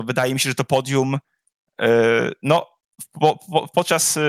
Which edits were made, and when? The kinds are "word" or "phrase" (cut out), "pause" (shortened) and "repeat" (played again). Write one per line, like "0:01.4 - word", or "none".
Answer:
none